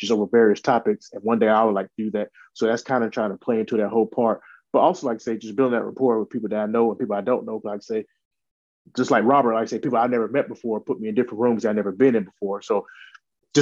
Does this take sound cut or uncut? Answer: uncut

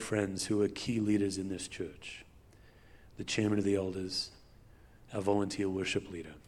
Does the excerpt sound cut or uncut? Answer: uncut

